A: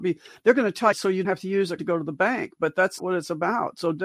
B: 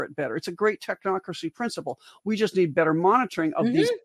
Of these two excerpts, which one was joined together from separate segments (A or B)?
A